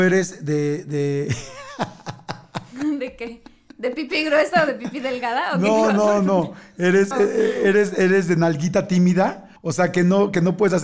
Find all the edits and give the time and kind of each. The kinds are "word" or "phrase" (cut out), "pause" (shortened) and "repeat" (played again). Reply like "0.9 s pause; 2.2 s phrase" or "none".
7.1 s word; 9.6 s pause

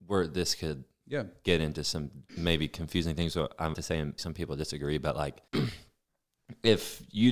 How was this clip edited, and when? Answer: 2.3 s pause; 3.7 s word; 4.2 s word; 5.5 s pause

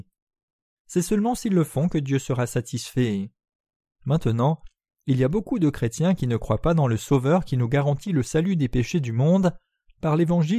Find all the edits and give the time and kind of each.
none

